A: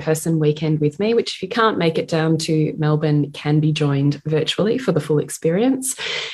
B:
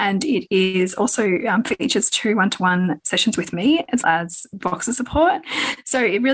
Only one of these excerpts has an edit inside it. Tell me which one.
B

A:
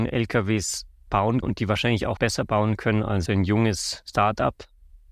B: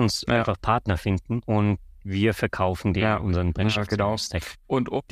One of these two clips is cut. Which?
A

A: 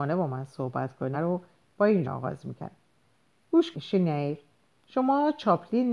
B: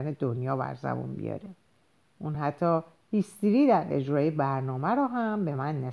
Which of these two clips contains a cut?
A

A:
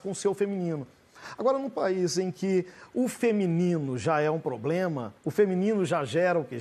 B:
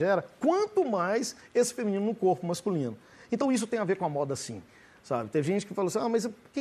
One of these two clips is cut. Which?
A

